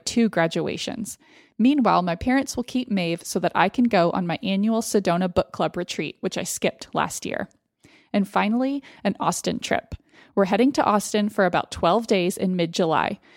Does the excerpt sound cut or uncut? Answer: uncut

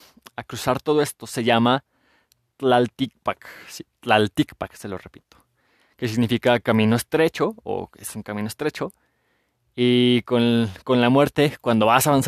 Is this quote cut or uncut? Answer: uncut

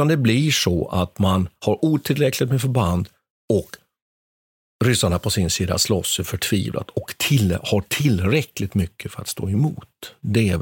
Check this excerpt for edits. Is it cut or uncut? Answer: uncut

